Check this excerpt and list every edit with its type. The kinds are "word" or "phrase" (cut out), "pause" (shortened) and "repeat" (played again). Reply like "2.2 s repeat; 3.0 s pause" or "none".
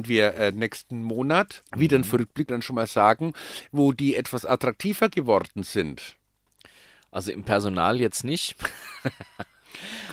1.7 s pause; 2.5 s phrase

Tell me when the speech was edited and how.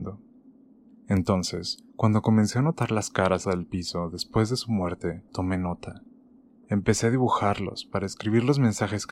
1.9 s pause; 3.4 s phrase; 5.3 s pause

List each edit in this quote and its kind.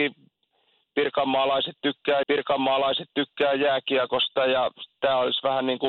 2.2 s repeat

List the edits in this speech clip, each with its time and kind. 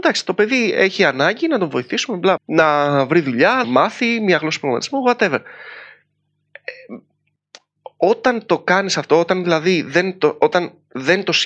2.4 s word; 3.6 s word

